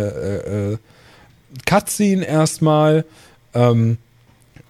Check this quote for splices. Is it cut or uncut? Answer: uncut